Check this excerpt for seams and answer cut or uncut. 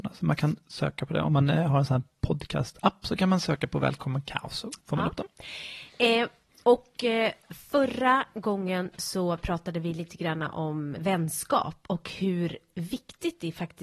cut